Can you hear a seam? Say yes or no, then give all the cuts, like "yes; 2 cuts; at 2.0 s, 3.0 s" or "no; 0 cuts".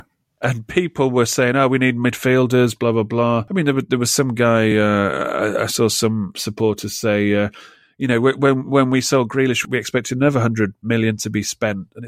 no; 0 cuts